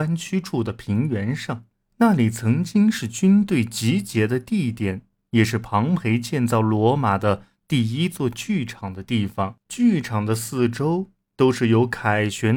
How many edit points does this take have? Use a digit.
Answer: 1